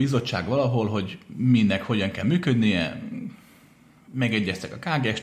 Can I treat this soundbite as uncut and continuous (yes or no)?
yes